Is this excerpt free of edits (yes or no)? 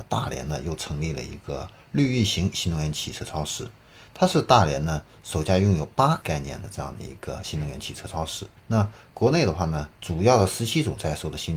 no